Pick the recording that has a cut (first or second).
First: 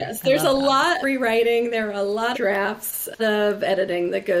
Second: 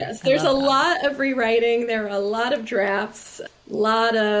first